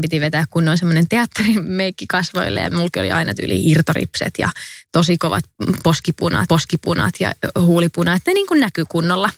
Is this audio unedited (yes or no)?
no